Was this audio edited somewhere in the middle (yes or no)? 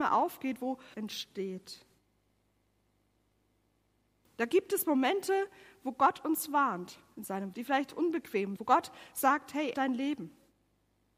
yes